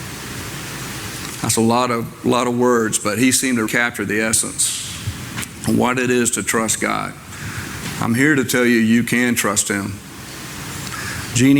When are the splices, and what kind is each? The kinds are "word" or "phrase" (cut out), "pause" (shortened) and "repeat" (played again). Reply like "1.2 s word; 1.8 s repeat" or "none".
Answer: 3.7 s word